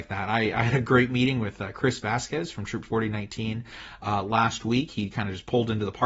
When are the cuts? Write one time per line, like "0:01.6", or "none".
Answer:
none